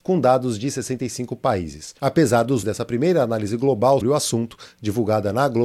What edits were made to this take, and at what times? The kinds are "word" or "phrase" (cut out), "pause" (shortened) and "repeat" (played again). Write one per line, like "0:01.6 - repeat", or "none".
0:02.6 - phrase
0:04.0 - word